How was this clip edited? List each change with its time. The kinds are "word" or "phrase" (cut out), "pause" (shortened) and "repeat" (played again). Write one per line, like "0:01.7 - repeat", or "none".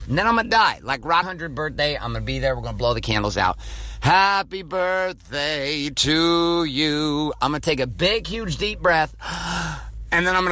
0:01.2 - phrase

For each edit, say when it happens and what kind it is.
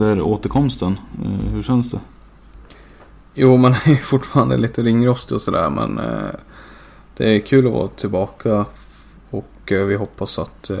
none

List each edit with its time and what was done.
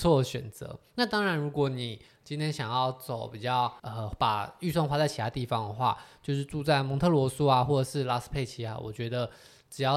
0:03.8 - pause

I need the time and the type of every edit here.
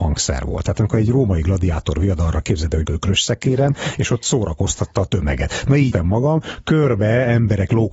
0:02.8 - word
0:05.9 - word

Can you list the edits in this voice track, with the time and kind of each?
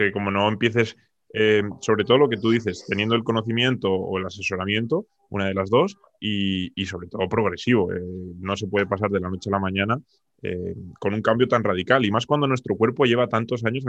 none

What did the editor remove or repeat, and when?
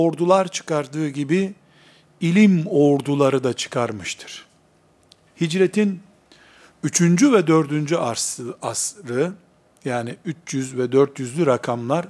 none

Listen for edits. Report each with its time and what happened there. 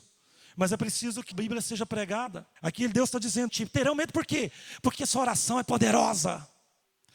0:01.3 - word
0:02.6 - pause
0:03.5 - phrase
0:04.9 - word

